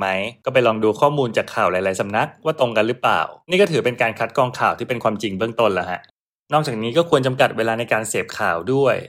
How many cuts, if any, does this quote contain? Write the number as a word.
zero